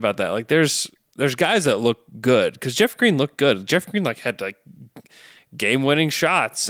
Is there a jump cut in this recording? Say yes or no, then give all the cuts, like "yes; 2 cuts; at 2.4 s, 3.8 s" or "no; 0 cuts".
no; 0 cuts